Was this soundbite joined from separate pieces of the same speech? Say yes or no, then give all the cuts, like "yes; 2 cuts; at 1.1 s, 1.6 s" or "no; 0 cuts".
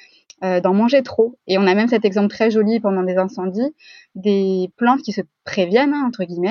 no; 0 cuts